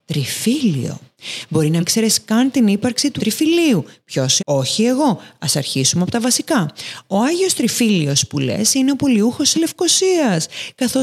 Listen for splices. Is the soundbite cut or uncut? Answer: cut